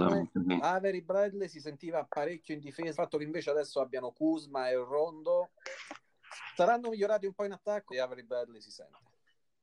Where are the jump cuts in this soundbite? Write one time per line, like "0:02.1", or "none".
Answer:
0:02.9
0:07.9